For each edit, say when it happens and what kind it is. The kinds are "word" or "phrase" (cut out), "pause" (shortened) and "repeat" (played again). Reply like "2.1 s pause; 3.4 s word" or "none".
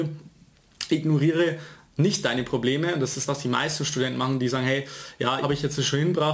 3.3 s word; 5.4 s word